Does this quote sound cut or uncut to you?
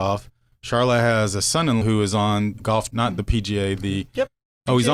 cut